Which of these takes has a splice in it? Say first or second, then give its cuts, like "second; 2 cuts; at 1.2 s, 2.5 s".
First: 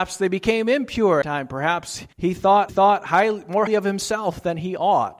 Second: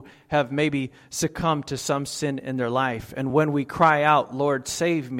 first; 4 cuts; at 1.2 s, 2.1 s, 2.7 s, 3.7 s